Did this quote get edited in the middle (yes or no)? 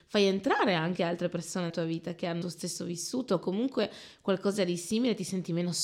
yes